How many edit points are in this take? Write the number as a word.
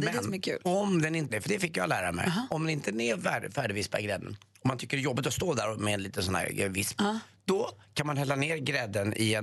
one